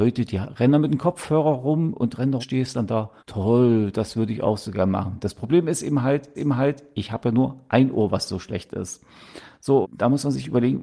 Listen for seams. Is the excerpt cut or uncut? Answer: cut